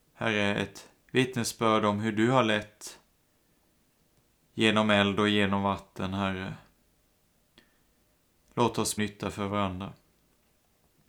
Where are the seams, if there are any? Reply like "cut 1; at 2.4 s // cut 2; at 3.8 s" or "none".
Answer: cut 1; at 1.0 s // cut 2; at 9.0 s